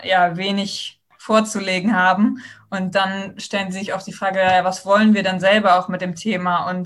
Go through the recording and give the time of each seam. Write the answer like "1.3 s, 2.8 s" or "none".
3.9 s